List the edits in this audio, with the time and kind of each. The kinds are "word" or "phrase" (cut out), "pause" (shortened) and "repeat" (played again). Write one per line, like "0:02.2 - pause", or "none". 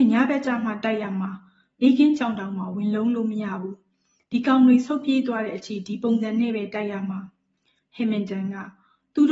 none